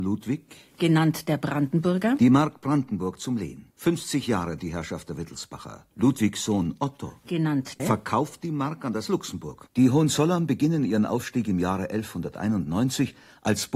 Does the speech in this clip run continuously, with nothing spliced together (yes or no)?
no